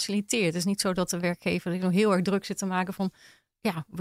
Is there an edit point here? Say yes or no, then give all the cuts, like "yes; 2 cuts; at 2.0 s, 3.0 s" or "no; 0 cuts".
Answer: no; 0 cuts